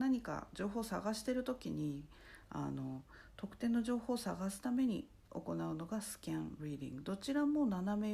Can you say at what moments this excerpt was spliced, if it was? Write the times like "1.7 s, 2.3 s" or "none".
5.2 s